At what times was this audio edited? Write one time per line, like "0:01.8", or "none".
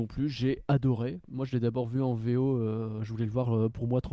none